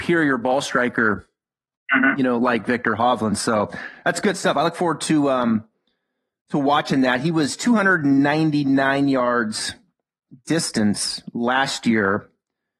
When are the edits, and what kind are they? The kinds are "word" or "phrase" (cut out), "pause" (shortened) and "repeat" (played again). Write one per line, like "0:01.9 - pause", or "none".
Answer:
none